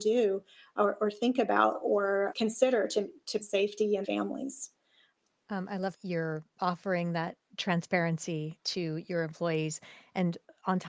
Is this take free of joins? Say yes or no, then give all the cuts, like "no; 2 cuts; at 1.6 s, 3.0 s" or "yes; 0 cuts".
no; 5 cuts; at 2.3 s, 3.4 s, 4.0 s, 5.9 s, 8.6 s